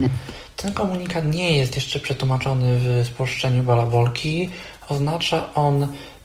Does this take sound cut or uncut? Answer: uncut